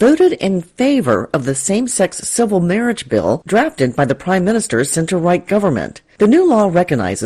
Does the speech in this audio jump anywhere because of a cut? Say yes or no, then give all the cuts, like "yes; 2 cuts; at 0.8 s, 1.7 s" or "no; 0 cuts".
no; 0 cuts